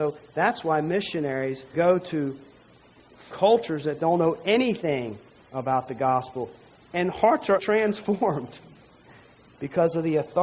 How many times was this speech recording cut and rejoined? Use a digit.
3